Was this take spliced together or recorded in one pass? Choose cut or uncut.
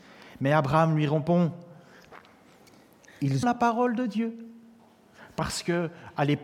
cut